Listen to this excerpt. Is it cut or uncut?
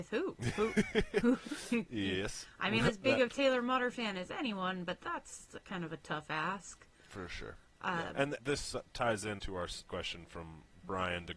cut